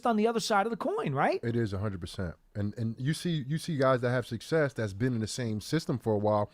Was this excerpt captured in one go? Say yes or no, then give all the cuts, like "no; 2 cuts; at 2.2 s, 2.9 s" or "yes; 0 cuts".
yes; 0 cuts